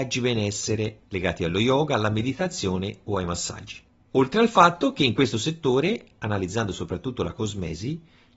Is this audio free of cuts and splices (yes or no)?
yes